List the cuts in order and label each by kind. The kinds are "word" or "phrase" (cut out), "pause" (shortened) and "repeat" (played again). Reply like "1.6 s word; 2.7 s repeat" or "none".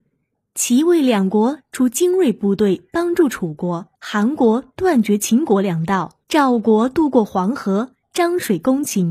4.0 s pause; 6.2 s pause

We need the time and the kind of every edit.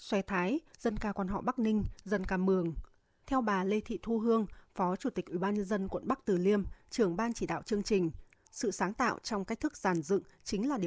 none

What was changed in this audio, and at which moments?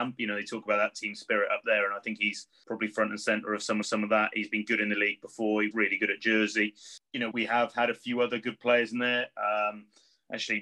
3.8 s repeat; 5.7 s word; 7.3 s word

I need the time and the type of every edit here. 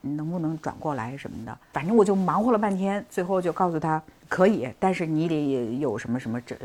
1.6 s pause; 4.2 s pause

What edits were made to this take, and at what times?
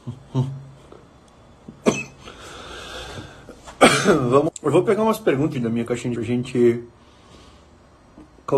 4.5 s word; 5.5 s phrase; 6.2 s phrase

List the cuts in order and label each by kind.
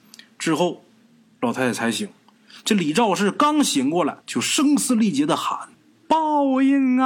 4.2 s pause; 5.7 s pause

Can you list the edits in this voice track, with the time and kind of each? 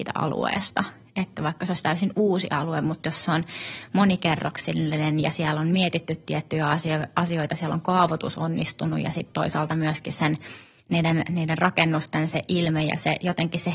none

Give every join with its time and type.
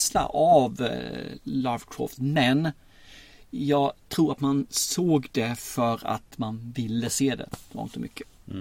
none

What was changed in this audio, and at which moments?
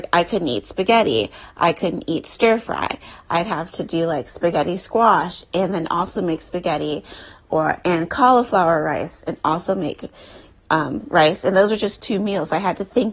none

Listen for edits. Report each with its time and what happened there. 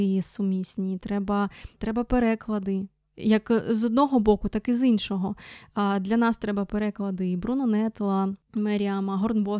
none

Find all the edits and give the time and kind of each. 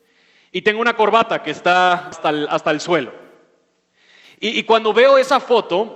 2.1 s phrase

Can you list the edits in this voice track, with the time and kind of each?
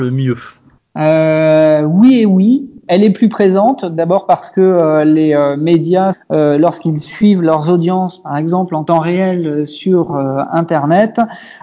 6.1 s phrase

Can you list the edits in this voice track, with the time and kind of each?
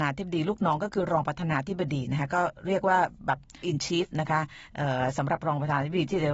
3.6 s word

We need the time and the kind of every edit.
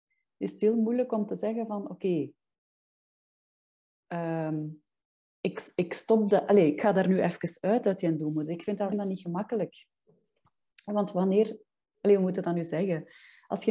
8.9 s phrase

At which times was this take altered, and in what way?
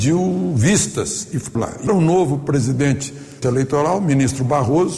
1.5 s word; 1.9 s word; 3.4 s phrase

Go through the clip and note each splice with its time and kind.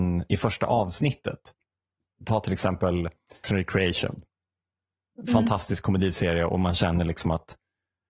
3.4 s word

